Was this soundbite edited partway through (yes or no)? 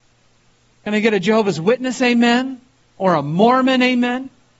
no